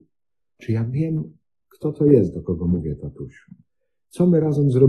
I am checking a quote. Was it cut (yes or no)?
no